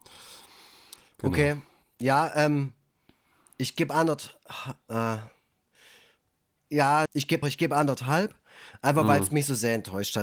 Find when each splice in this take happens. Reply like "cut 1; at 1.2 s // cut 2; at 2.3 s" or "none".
cut 1; at 7.1 s // cut 2; at 7.4 s